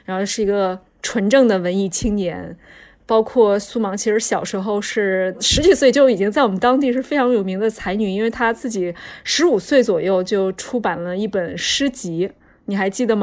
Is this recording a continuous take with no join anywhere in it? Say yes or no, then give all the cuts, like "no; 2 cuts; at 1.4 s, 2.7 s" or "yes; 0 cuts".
yes; 0 cuts